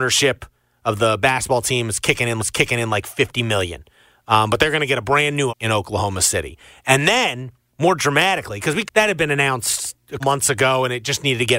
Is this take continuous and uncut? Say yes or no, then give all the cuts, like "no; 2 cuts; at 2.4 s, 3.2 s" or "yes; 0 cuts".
no; 5 cuts; at 2.4 s, 5.5 s, 7.7 s, 8.9 s, 10.2 s